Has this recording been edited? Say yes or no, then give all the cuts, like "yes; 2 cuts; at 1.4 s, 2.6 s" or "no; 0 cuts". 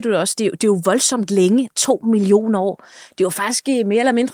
no; 0 cuts